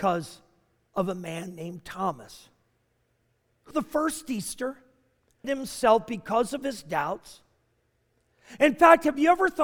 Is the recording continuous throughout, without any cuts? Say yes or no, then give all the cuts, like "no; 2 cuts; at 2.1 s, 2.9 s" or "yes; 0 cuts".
no; 2 cuts; at 3.7 s, 5.4 s